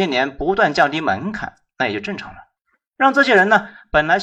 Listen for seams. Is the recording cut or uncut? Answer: cut